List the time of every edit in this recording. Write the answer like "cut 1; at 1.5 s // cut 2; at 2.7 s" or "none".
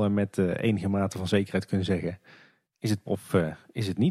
cut 1; at 3.1 s